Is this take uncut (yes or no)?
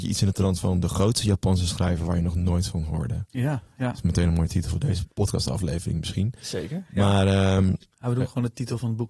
no